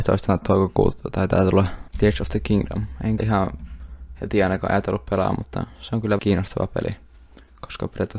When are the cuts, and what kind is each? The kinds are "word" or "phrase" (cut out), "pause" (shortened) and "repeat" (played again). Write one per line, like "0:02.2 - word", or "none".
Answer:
0:01.9 - pause
0:03.2 - word
0:06.2 - word